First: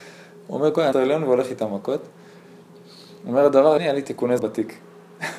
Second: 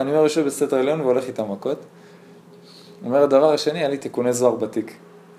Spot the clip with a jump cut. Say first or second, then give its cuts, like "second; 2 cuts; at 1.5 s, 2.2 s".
first; 3 cuts; at 0.9 s, 3.8 s, 4.4 s